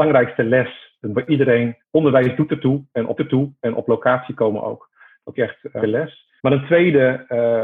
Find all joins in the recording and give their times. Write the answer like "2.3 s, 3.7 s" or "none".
1.1 s, 1.8 s, 3.2 s, 5.4 s, 5.8 s, 6.4 s